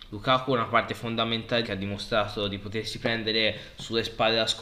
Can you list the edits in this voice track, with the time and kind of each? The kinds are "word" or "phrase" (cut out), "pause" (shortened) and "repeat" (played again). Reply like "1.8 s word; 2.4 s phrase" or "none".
1.6 s word

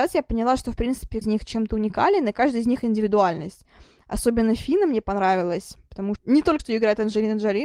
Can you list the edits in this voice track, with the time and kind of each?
1.2 s word; 6.2 s word; 6.6 s word

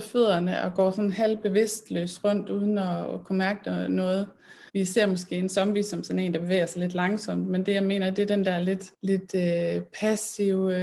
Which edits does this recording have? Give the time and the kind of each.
4.7 s pause; 8.9 s pause

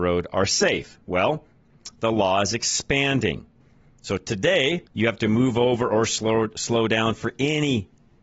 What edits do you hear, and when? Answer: 3.6 s pause; 4.9 s pause

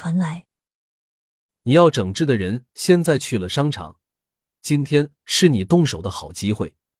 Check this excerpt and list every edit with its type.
none

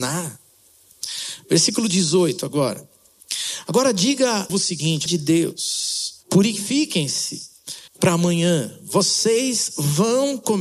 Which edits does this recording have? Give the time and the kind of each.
4.5 s phrase; 5.1 s word; 6.2 s phrase; 7.9 s pause

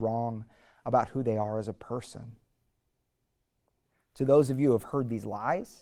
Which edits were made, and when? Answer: none

